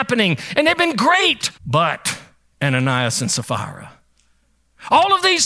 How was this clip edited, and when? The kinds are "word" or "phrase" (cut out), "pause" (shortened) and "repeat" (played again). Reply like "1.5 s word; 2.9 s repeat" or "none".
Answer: 1.6 s pause